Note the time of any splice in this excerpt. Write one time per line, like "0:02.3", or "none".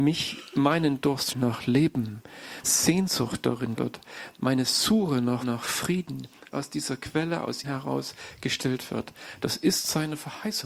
0:01.3
0:02.6
0:03.8
0:04.4
0:05.4
0:06.5
0:07.6

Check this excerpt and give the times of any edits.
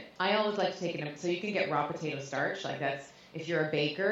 none

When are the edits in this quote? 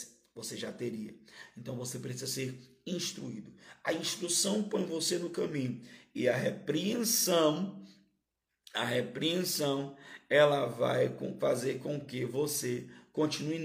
none

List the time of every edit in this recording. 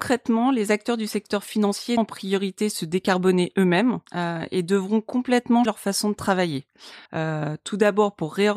0:02.0
0:04.1
0:05.7
0:07.1

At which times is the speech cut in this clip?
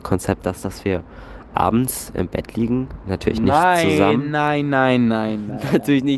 none

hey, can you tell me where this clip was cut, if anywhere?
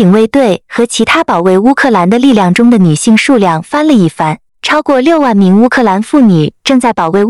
0:04.5

